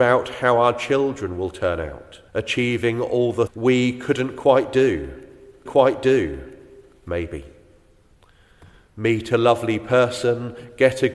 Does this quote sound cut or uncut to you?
cut